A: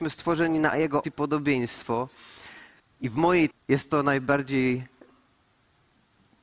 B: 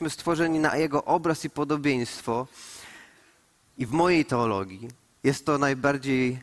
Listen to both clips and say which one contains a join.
A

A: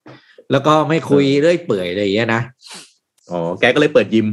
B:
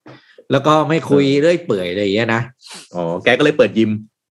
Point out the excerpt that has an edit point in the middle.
B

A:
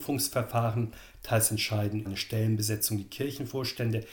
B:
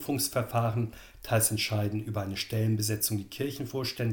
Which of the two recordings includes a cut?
A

